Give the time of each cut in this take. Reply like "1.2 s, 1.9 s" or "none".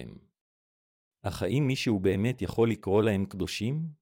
none